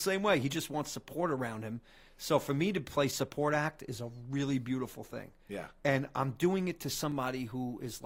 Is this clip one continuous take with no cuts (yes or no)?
yes